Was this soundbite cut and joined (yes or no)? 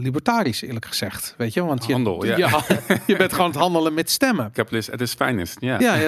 no